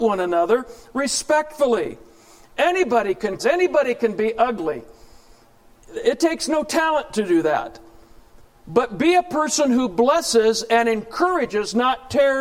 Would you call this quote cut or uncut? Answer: cut